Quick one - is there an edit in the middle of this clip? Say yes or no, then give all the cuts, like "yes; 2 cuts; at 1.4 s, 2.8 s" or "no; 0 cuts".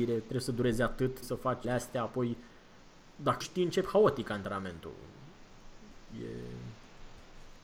yes; 3 cuts; at 1.2 s, 1.6 s, 3.4 s